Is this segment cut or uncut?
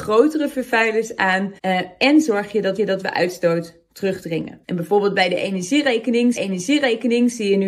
cut